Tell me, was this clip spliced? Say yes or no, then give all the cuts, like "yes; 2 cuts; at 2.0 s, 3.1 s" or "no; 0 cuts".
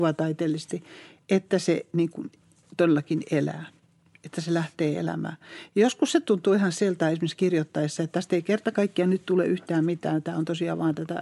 no; 0 cuts